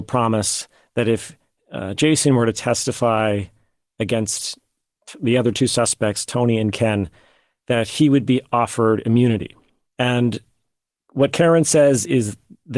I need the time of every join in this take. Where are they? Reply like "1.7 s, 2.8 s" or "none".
none

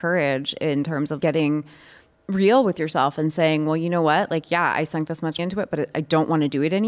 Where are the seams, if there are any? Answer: 1.2 s, 5.4 s

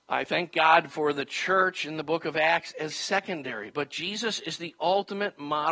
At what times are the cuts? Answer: 2.9 s, 3.7 s

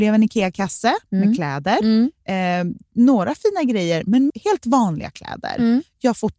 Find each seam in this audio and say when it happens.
4.3 s

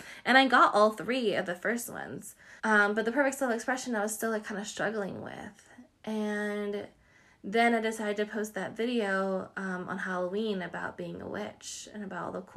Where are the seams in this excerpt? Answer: 2.6 s

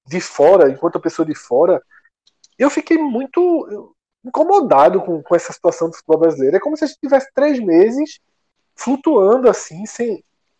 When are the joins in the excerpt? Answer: none

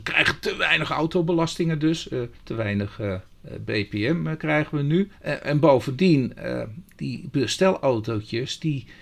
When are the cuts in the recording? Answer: 2.3 s, 5.1 s

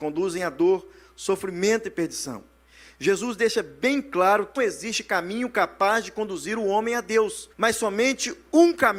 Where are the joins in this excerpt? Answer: 4.6 s, 7.5 s

